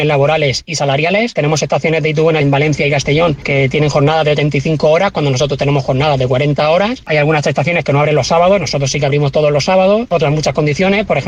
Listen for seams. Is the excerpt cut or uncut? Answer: uncut